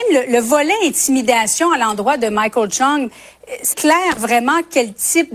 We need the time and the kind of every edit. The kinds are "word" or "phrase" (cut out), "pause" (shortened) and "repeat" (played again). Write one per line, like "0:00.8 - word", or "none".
0:03.7 - phrase